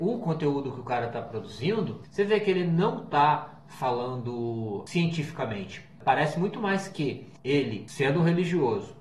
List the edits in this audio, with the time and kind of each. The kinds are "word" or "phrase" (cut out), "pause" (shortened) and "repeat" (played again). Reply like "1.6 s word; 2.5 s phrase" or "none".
none